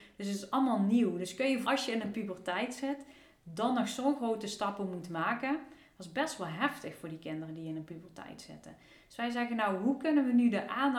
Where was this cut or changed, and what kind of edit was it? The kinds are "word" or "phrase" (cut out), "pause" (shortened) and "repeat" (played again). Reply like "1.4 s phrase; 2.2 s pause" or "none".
1.6 s word